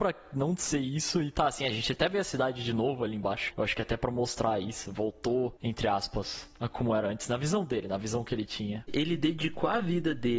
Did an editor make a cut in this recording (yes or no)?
no